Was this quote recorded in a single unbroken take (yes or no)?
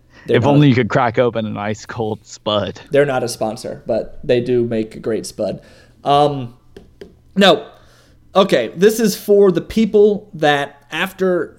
yes